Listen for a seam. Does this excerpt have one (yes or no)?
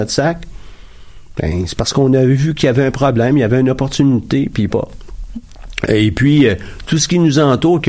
yes